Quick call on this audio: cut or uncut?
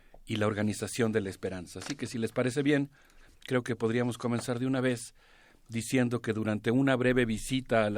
uncut